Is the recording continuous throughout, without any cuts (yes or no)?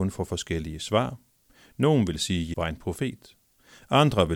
no